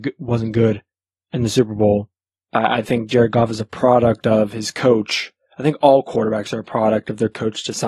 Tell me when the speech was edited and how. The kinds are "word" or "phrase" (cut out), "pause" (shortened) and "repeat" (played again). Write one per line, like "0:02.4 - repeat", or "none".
0:00.9 - pause
0:02.4 - pause